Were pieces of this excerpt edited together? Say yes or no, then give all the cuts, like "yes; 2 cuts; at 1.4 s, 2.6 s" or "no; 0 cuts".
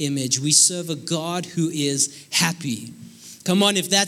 no; 0 cuts